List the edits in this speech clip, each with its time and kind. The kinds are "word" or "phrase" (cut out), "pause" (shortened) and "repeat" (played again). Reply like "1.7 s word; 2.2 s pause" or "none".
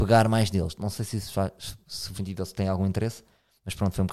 2.2 s word